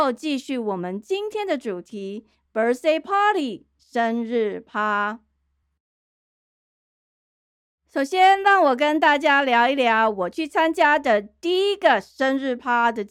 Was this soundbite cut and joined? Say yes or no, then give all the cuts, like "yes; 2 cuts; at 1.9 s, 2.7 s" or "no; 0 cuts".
no; 0 cuts